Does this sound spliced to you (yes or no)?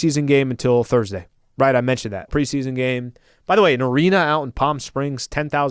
yes